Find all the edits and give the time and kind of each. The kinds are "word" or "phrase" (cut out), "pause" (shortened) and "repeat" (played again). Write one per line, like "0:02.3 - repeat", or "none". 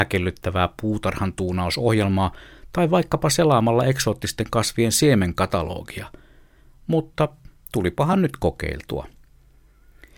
none